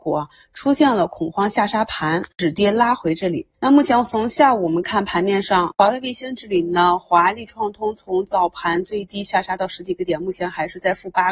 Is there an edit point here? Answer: yes; 1 cut; at 3.5 s

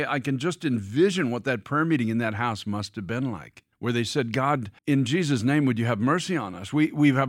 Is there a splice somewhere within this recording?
yes; 2 cuts; at 3.7 s, 4.8 s

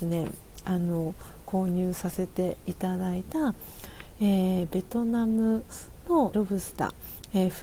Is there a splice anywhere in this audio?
yes; 1 cut; at 6.3 s

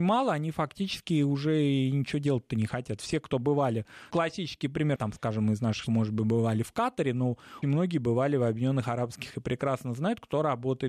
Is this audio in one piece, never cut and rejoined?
no; 5 cuts; at 4.1 s, 5.0 s, 5.9 s, 7.6 s, 9.3 s

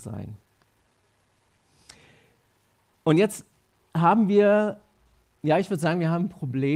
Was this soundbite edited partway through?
no; 0 cuts

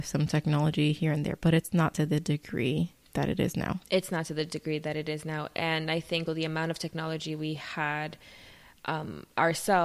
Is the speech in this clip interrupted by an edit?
yes; 2 cuts; at 3.0 s, 6.3 s

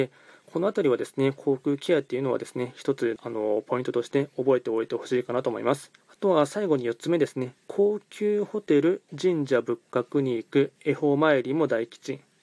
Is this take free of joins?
no; 5 cuts; at 3.2 s, 6.0 s, 7.6 s, 9.1 s, 10.8 s

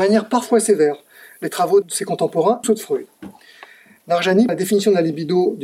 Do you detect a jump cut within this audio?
yes; 3 cuts; at 1.8 s, 2.6 s, 4.5 s

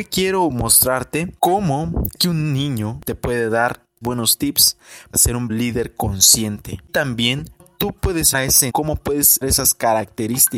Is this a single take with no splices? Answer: no; 9 cuts; at 2.2 s, 4.0 s, 5.1 s, 5.5 s, 6.9 s, 7.6 s, 8.3 s, 8.7 s, 9.4 s

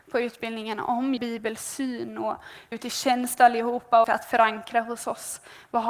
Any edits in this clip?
yes; 3 cuts; at 1.2 s, 2.7 s, 4.0 s

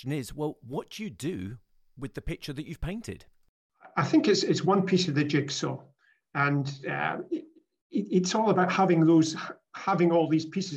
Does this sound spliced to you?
no; 0 cuts

